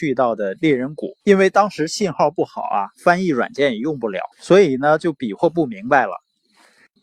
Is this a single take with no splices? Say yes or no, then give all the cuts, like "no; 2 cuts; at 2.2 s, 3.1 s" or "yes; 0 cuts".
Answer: no; 2 cuts; at 1.2 s, 4.3 s